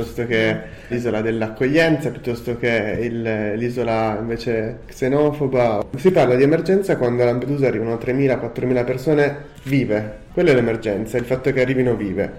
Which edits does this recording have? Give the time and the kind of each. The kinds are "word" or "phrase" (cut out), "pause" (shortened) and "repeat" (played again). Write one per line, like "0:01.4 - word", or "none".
0:00.9 - word